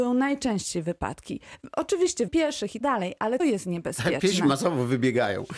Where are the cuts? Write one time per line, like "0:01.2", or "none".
0:02.3
0:02.8
0:03.4